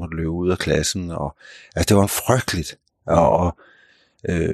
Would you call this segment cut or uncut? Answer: uncut